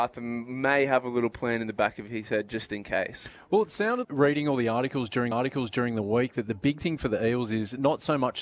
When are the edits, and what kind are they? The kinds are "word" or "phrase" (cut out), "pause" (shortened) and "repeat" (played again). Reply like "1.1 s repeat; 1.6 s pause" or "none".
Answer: 4.0 s word; 5.3 s repeat